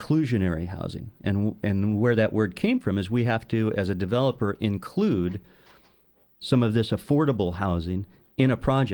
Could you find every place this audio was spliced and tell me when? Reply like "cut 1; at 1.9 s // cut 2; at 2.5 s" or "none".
none